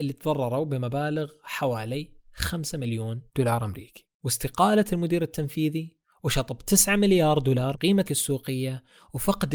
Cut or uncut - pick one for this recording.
cut